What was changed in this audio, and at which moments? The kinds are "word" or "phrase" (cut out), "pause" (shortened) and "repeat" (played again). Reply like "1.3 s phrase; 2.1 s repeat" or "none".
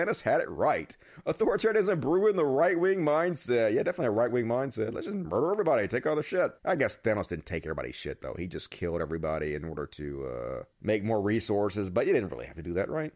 6.6 s pause; 10.7 s pause

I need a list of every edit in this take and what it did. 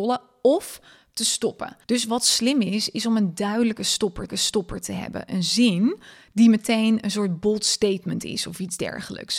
1.8 s pause; 4.3 s repeat

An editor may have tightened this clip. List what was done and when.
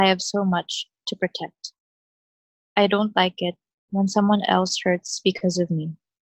none

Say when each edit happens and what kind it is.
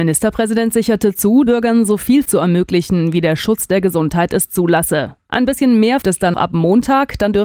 1.5 s word; 2.2 s word; 5.2 s pause; 6.0 s phrase; 6.3 s word

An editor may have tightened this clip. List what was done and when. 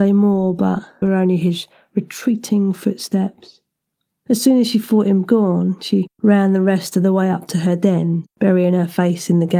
1.0 s word; 6.1 s pause; 8.3 s pause

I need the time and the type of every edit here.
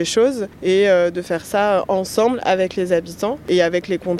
none

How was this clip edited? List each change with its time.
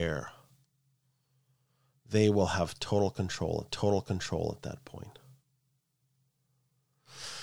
3.7 s repeat

